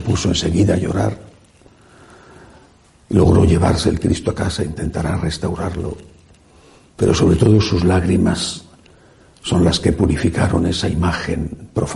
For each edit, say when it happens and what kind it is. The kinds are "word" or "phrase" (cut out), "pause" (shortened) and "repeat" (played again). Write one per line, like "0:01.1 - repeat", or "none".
none